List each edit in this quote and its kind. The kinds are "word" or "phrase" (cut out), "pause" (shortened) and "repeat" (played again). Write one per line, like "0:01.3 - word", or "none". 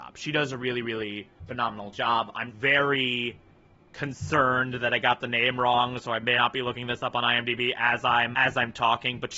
0:01.4 - pause
0:02.5 - word
0:06.4 - phrase
0:08.3 - word